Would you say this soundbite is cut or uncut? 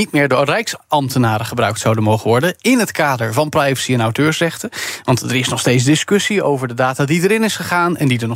uncut